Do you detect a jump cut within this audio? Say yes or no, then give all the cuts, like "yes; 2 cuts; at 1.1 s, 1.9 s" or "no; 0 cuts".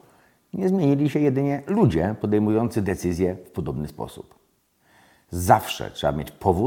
no; 0 cuts